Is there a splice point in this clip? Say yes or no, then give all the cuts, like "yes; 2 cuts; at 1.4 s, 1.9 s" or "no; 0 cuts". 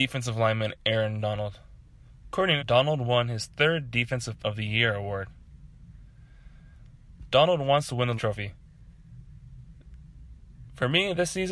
yes; 3 cuts; at 2.6 s, 4.4 s, 8.2 s